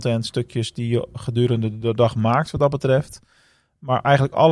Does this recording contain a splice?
no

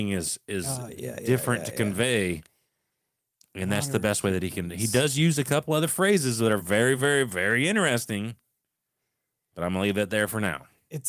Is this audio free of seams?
yes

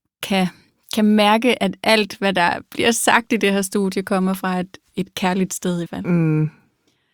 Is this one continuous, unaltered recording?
no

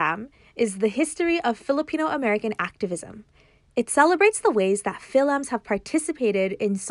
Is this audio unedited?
yes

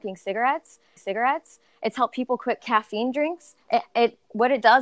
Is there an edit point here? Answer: yes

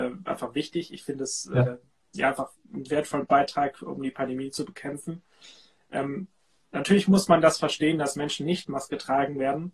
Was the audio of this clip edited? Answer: no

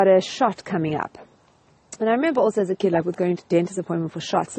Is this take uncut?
yes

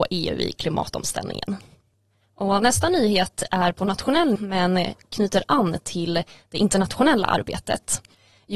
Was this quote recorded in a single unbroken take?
no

